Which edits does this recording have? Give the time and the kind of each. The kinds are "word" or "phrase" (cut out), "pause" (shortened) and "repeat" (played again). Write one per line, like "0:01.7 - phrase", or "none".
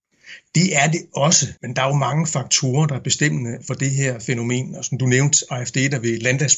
0:01.6 - pause